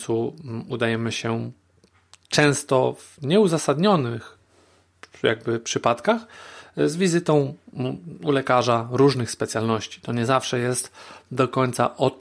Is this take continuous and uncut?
yes; 0 cuts

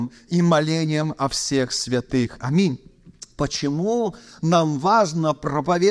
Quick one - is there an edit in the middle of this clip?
no; 0 cuts

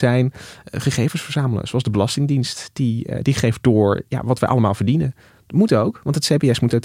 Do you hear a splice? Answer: no; 0 cuts

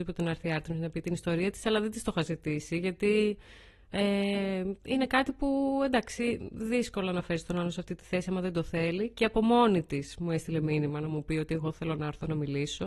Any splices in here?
no; 0 cuts

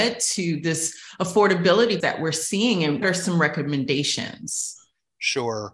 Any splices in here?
yes; 2 cuts; at 2.0 s, 3.0 s

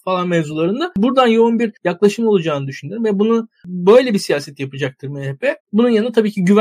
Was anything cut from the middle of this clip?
yes; 2 cuts; at 1.8 s, 5.6 s

